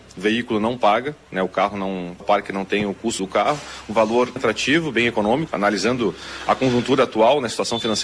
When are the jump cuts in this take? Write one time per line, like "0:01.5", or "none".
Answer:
0:02.2
0:03.2
0:04.4
0:05.5